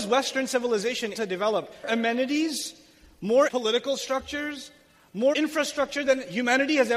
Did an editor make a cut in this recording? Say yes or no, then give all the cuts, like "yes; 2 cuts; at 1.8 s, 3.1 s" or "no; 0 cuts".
yes; 4 cuts; at 1.1 s, 1.8 s, 3.5 s, 5.3 s